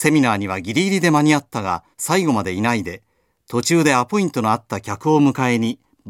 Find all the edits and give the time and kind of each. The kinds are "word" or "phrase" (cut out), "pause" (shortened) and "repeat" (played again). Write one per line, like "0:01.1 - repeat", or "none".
0:01.9 - pause